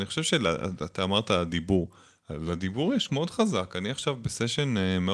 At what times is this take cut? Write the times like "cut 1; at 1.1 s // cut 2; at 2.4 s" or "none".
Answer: cut 1; at 3.1 s